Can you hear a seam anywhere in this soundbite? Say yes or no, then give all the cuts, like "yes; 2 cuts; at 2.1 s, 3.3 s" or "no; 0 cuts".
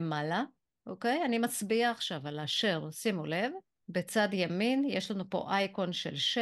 yes; 1 cut; at 3.8 s